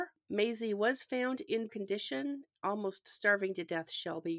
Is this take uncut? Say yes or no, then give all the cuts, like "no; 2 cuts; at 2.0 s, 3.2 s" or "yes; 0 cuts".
no; 1 cut; at 1.7 s